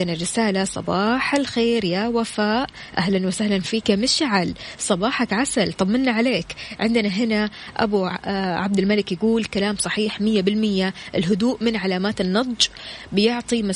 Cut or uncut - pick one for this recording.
uncut